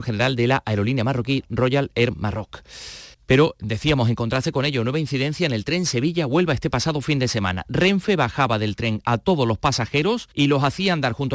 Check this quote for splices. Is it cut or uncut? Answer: cut